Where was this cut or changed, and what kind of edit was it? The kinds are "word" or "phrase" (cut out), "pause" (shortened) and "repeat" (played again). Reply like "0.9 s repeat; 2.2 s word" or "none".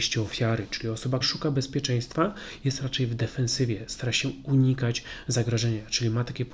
1.2 s word

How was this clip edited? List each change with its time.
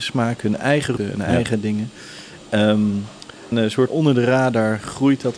1.0 s word; 3.5 s word; 3.9 s word

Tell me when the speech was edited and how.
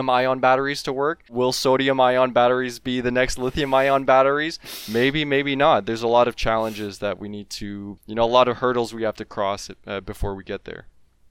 1.3 s pause

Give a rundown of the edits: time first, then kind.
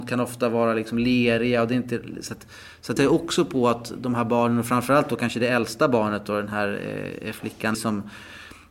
3.0 s phrase; 7.7 s word

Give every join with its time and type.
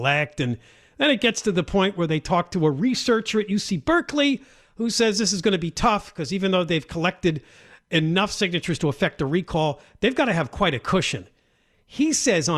none

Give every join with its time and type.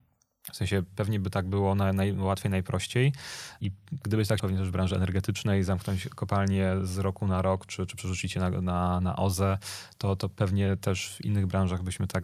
4.4 s phrase

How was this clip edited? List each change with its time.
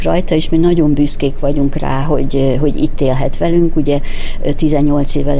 none

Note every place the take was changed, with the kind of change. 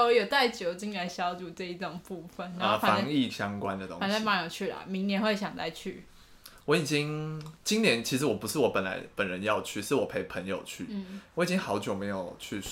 7.6 s pause

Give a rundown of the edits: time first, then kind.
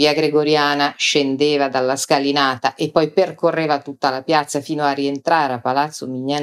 none

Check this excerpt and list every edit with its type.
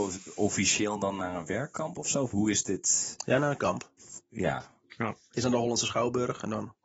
none

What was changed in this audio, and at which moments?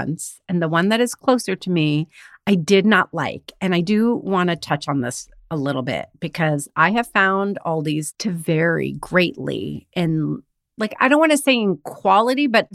none

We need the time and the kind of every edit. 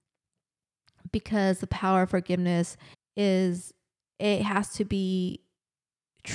2.9 s pause

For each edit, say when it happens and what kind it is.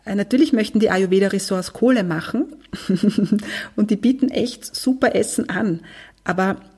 none

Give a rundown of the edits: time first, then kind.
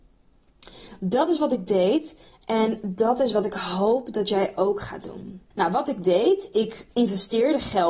5.5 s pause

